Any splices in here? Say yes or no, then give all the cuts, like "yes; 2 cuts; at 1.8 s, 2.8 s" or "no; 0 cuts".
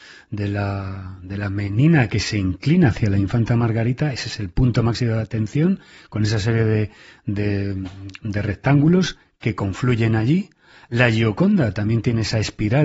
no; 0 cuts